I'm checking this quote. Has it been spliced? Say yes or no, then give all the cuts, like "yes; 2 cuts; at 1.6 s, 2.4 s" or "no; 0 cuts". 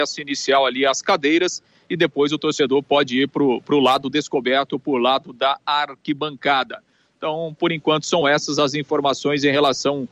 no; 0 cuts